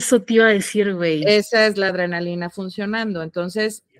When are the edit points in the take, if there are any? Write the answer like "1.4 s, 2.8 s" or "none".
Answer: none